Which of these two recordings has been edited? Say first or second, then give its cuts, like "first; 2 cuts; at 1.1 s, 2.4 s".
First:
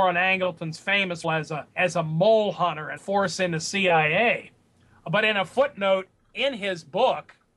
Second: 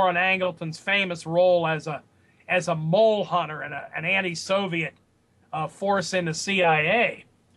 first; 3 cuts; at 1.2 s, 1.7 s, 3.0 s